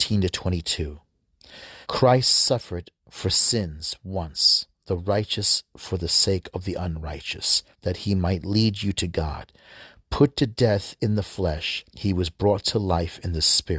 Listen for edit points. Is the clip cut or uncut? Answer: cut